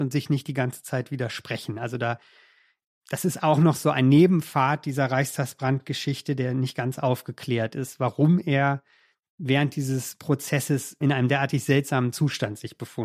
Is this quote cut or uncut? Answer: uncut